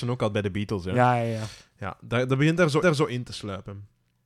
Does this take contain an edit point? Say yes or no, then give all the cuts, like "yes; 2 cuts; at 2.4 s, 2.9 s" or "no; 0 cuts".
yes; 1 cut; at 2.8 s